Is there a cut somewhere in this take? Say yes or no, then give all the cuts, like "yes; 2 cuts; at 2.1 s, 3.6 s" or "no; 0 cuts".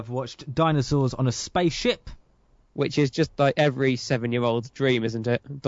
no; 0 cuts